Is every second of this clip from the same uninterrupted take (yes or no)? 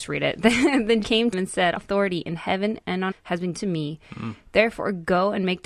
no